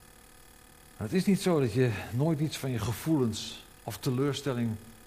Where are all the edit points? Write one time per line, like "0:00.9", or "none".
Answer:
0:03.7